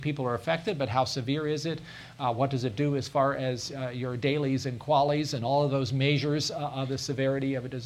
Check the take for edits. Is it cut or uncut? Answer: uncut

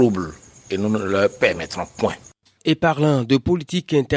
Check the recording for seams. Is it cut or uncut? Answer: uncut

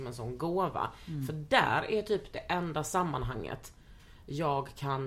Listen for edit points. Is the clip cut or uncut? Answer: uncut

